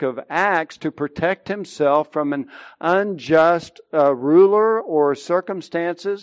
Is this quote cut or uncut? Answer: uncut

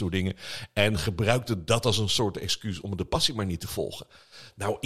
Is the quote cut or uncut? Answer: uncut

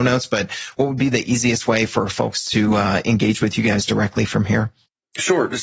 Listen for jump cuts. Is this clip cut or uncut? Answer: uncut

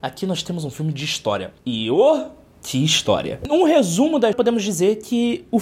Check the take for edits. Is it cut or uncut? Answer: cut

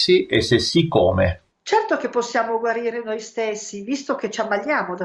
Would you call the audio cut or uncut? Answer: cut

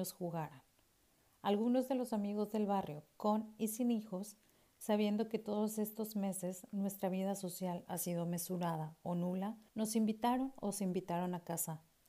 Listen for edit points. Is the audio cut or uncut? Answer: cut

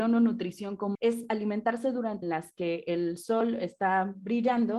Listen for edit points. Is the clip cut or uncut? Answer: cut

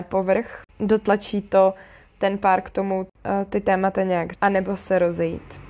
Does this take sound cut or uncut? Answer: cut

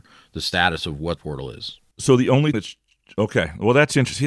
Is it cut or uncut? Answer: cut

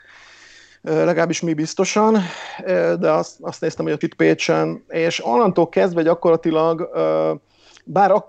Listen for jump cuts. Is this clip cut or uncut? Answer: cut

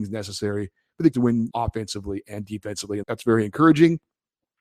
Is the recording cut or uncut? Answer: cut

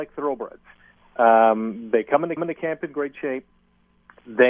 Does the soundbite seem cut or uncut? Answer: cut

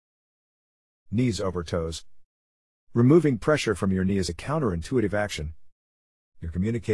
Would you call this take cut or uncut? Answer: cut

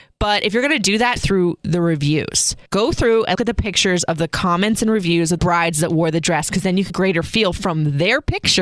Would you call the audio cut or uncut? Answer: cut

